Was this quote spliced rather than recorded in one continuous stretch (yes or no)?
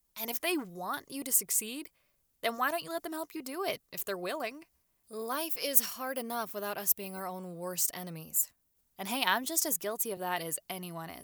no